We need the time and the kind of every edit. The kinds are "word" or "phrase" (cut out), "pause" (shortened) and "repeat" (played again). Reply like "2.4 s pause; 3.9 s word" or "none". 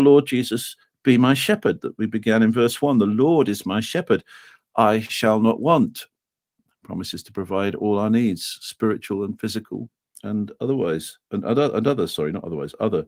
none